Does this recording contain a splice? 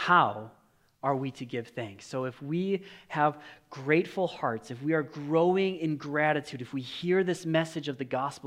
no; 0 cuts

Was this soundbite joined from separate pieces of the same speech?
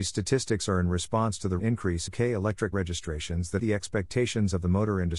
yes; 4 cuts; at 1.6 s, 2.1 s, 2.7 s, 3.6 s

